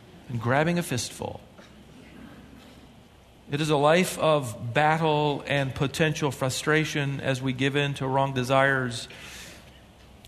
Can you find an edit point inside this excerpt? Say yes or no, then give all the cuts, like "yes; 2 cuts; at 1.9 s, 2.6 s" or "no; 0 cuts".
no; 0 cuts